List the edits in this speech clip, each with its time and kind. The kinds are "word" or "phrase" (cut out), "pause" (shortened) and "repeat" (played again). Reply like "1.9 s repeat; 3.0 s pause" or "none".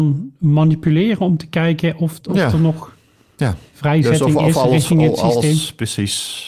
2.2 s word